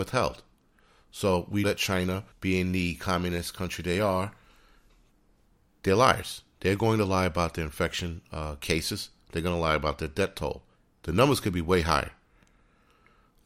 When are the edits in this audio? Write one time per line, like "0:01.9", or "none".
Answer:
0:01.6
0:02.3
0:10.8